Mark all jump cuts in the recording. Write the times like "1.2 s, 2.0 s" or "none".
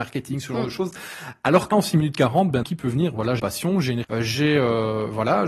1.7 s, 2.6 s, 3.4 s, 4.0 s